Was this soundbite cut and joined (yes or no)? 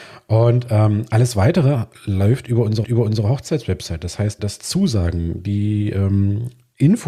yes